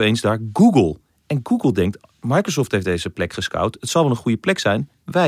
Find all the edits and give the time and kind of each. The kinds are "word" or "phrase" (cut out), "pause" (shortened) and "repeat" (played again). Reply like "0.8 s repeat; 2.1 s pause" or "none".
none